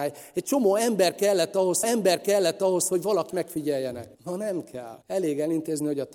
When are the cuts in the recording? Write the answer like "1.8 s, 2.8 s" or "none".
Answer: 1.8 s, 3.3 s, 4.1 s, 5.0 s